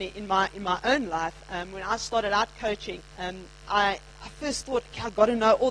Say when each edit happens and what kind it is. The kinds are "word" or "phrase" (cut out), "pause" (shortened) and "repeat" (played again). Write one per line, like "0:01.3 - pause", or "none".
0:03.1 - pause